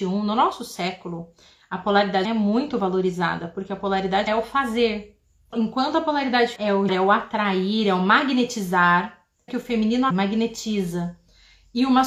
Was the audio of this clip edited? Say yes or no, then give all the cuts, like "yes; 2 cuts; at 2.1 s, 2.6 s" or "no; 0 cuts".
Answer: yes; 7 cuts; at 2.2 s, 4.3 s, 5.5 s, 6.6 s, 6.9 s, 9.5 s, 10.1 s